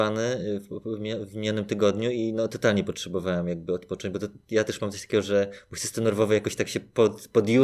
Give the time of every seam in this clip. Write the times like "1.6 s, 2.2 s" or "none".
none